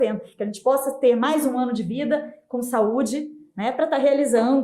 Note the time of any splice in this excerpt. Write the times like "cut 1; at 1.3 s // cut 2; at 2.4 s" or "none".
none